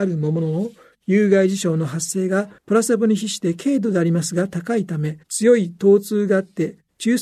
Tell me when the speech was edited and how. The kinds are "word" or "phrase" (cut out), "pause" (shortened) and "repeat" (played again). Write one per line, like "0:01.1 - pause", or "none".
0:02.6 - pause
0:05.2 - pause

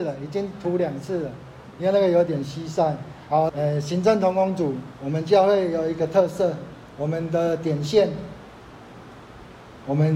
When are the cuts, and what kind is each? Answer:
0:03.5 - phrase

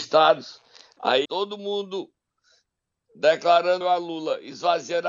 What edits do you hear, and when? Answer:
0:01.2 - word
0:03.8 - word

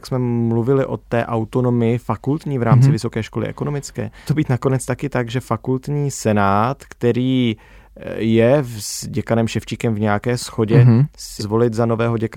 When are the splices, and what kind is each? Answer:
0:04.3 - word
0:11.4 - word

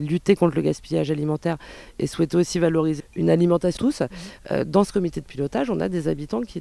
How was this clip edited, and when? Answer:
0:03.0 - word
0:03.8 - phrase

